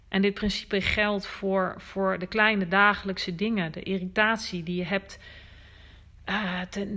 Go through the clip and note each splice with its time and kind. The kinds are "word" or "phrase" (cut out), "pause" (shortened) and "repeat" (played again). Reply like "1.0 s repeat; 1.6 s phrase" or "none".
none